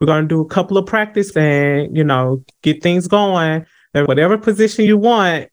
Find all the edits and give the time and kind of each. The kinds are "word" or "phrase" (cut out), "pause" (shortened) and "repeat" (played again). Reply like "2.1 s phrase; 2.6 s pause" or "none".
1.3 s word; 4.1 s word